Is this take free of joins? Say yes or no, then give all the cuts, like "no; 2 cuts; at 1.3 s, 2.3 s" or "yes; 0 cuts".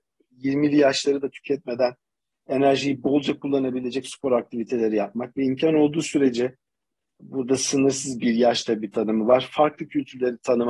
yes; 0 cuts